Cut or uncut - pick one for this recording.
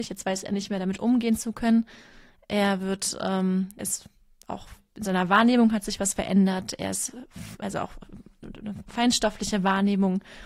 cut